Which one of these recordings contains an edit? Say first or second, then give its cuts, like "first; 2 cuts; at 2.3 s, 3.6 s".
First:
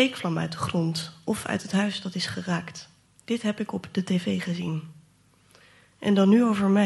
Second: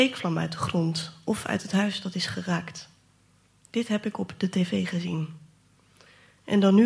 first; 1 cut; at 3.0 s